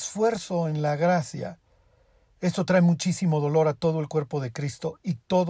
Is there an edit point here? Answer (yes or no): no